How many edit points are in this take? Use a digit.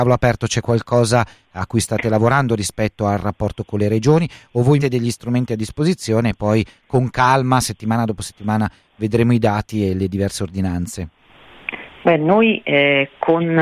1